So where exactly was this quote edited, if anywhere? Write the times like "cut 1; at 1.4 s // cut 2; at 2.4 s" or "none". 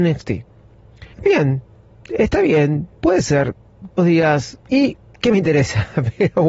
cut 1; at 1.1 s // cut 2; at 2.9 s // cut 3; at 4.0 s // cut 4; at 4.6 s